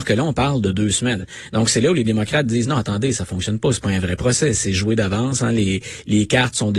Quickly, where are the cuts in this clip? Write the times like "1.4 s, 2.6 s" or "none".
none